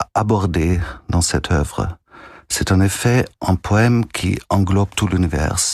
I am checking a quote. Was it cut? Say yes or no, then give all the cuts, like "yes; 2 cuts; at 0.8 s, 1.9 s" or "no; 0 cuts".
no; 0 cuts